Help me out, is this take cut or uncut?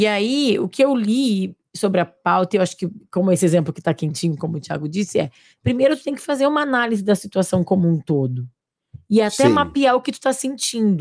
cut